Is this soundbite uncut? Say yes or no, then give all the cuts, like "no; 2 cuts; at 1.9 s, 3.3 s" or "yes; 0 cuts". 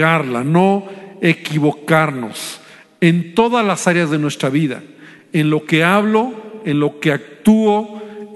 yes; 0 cuts